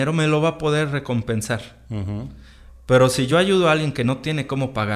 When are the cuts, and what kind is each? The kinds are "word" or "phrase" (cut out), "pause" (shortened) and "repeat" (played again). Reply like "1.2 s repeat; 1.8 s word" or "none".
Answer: none

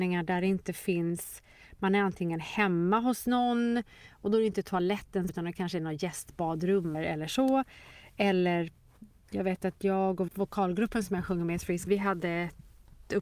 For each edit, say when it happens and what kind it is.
5.3 s word; 6.9 s word; 10.3 s word; 11.9 s word

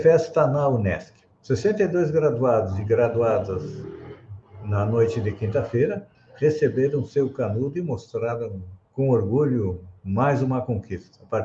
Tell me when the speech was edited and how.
1.3 s pause; 6.1 s pause; 8.8 s pause

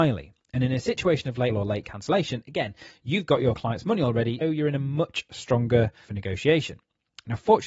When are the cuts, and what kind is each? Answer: 1.5 s word; 4.4 s word; 6.0 s word

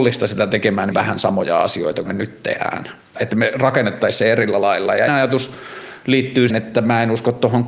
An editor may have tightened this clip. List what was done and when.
0.9 s phrase; 2.0 s phrase; 3.1 s word; 5.1 s word; 6.5 s word

